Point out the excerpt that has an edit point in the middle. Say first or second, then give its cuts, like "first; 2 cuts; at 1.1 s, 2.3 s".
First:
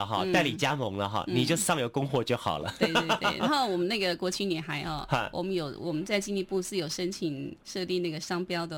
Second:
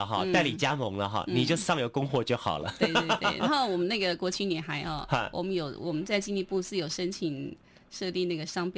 first; 1 cut; at 7.6 s